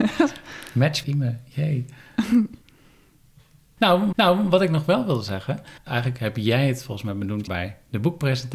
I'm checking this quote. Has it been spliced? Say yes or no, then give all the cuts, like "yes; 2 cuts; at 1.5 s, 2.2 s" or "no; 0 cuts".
yes; 5 cuts; at 1.0 s, 2.6 s, 4.1 s, 5.8 s, 7.5 s